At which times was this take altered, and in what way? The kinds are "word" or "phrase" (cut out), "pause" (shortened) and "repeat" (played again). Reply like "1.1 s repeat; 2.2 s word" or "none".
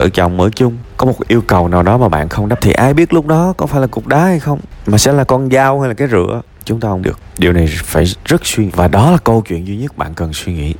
2.6 s word; 7.0 s word; 8.7 s word